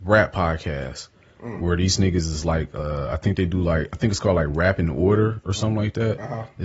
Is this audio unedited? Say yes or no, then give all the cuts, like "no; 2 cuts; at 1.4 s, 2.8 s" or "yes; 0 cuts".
yes; 0 cuts